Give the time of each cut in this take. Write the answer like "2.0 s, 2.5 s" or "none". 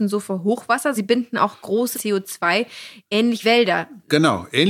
1.0 s, 1.9 s, 3.4 s